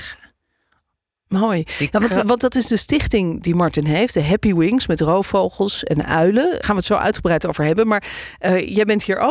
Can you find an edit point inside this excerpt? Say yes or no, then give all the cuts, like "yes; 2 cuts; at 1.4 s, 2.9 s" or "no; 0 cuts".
yes; 1 cut; at 6.6 s